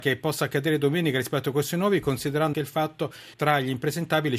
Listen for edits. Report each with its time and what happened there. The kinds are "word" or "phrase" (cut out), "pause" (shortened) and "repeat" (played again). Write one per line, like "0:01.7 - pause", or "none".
0:02.5 - word
0:03.3 - word